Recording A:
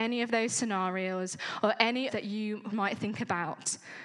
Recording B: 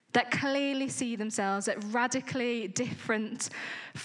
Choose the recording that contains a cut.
A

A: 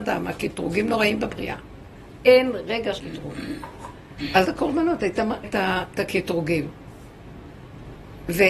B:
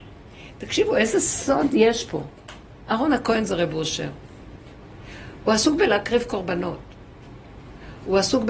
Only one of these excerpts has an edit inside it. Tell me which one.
A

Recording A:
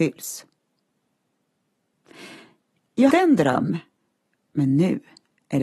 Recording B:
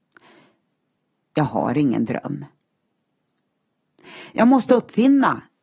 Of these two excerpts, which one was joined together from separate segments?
A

